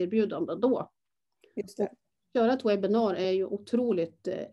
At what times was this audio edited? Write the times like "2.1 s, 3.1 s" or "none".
none